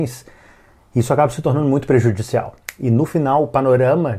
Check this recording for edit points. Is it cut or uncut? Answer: uncut